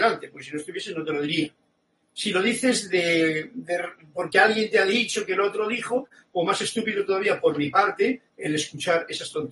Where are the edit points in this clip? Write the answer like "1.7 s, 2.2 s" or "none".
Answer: none